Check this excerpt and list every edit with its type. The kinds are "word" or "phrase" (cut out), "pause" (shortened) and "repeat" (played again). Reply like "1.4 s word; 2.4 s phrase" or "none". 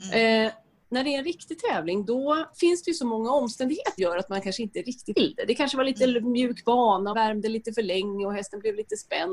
2.5 s word; 4.0 s word; 5.1 s word; 7.1 s word